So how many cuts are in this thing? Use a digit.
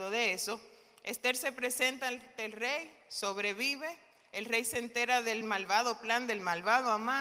0